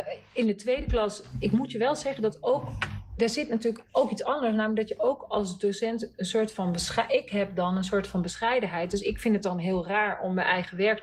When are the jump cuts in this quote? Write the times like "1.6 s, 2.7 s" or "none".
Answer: none

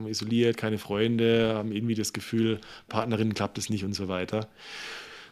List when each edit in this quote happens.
2.9 s

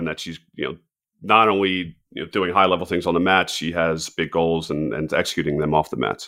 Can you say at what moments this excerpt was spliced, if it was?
2.0 s

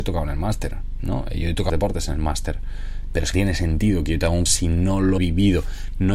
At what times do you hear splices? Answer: 1.7 s, 3.3 s, 4.5 s, 5.2 s

